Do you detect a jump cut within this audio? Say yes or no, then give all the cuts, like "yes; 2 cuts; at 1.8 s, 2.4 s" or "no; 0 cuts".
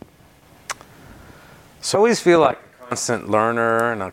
yes; 1 cut; at 1.9 s